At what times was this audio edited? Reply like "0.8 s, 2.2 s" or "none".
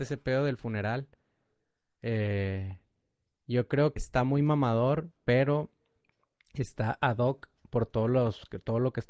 4.0 s

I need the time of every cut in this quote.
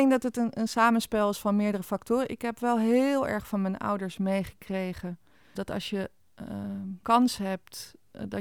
5.6 s, 7.0 s

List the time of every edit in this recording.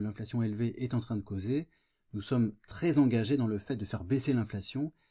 none

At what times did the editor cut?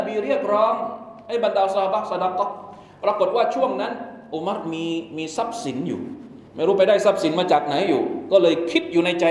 6.5 s

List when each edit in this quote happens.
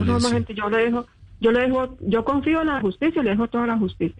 2.8 s

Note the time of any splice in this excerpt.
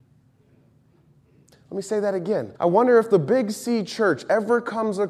2.6 s

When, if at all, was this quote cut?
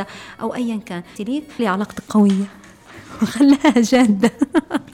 1.2 s, 1.6 s

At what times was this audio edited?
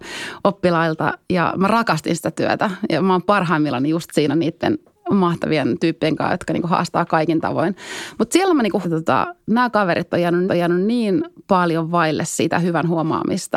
8.8 s, 10.5 s

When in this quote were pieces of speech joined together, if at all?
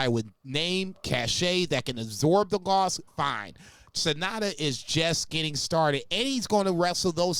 3.1 s

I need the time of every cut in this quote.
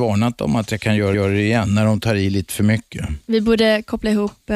1.1 s, 3.2 s

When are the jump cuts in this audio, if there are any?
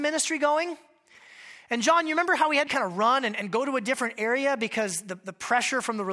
2.7 s

